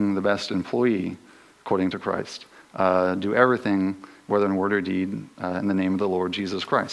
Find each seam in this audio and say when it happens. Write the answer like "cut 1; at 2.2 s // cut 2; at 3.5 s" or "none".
none